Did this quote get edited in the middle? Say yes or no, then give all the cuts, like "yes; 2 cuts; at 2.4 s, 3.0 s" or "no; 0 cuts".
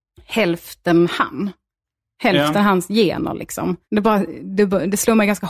yes; 1 cut; at 3.8 s